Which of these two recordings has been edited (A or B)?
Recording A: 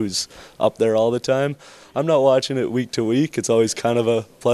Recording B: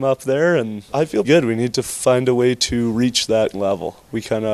B